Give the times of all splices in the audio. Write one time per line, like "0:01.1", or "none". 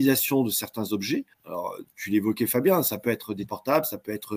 0:01.3
0:03.5